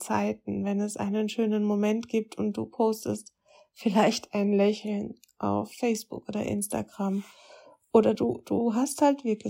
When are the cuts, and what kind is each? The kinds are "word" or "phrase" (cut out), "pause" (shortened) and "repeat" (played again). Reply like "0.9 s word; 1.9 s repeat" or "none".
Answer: none